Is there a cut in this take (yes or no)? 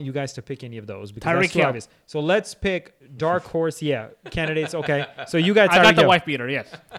yes